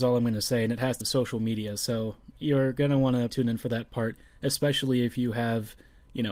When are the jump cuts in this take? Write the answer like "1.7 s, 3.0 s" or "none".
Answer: 1.0 s, 3.3 s